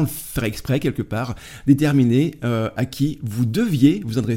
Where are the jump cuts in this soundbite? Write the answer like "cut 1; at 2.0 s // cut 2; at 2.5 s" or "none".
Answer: none